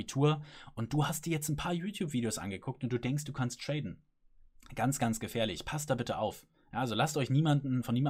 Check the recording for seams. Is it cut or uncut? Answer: uncut